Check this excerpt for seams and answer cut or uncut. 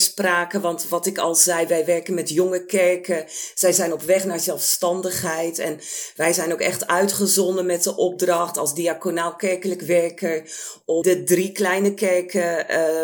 cut